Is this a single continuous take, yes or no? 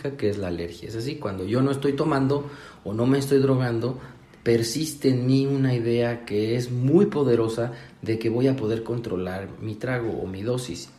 yes